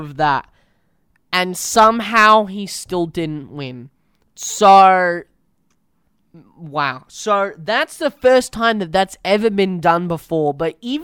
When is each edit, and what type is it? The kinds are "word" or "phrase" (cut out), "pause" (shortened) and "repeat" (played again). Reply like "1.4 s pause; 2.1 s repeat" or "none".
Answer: none